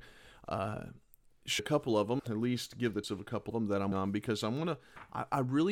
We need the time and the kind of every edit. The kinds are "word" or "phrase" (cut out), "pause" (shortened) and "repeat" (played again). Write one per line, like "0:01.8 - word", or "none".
0:01.6 - word
0:02.2 - word
0:03.0 - word
0:03.5 - word
0:03.9 - word